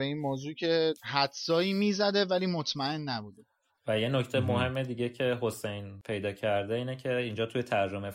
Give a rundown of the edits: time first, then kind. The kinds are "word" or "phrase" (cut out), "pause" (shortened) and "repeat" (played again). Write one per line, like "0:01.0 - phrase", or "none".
none